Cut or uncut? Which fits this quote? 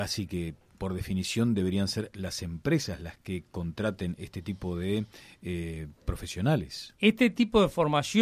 uncut